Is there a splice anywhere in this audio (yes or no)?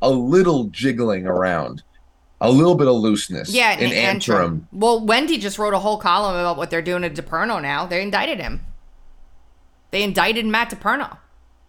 no